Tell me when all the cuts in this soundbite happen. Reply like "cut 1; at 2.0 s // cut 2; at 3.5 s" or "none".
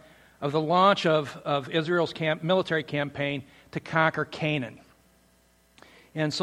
none